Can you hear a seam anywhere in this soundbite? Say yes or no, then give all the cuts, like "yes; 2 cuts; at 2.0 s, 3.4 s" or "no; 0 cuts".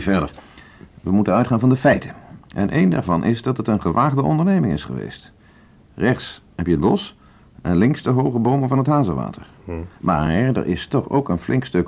no; 0 cuts